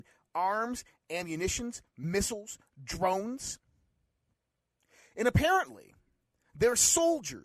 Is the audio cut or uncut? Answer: uncut